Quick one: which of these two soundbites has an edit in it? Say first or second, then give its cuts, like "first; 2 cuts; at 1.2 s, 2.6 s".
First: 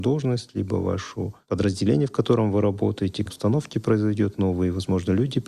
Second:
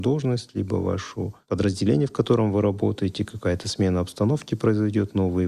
first; 1 cut; at 3.3 s